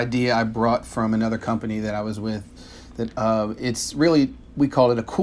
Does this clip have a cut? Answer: no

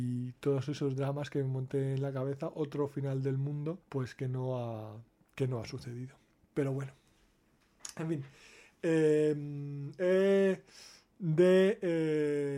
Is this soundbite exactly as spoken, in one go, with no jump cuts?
no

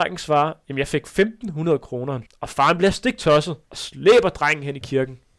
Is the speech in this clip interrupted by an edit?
yes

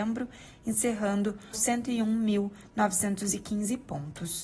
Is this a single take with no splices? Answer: no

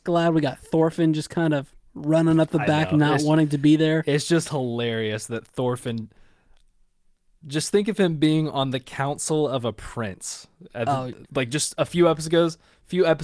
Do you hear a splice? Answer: yes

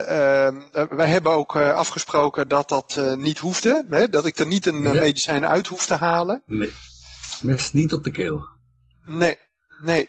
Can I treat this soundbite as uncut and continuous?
yes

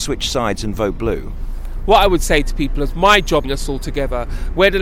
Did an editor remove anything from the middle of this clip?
yes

